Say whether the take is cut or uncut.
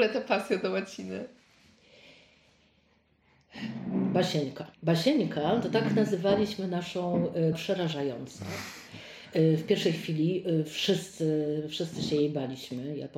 cut